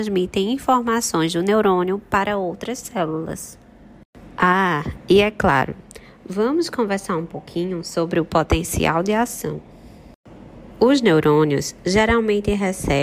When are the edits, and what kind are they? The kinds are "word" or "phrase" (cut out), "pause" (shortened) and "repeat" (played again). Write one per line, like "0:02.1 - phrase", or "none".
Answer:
none